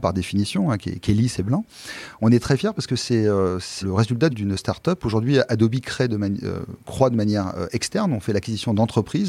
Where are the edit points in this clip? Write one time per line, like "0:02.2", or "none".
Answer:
0:03.8
0:04.3